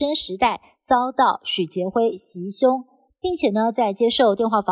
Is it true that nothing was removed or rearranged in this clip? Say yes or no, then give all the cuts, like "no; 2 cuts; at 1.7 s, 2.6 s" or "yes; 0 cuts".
yes; 0 cuts